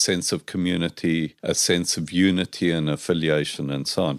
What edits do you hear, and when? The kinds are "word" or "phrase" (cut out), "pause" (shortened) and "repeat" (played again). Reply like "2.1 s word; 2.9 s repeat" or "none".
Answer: 1.4 s pause